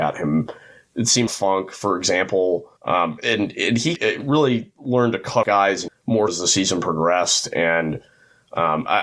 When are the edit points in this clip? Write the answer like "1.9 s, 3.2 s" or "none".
1.3 s, 2.8 s, 4.0 s, 4.8 s, 5.4 s, 5.9 s, 6.3 s